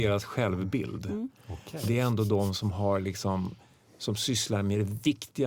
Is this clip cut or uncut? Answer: uncut